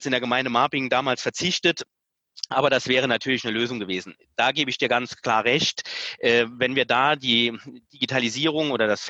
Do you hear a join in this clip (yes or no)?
no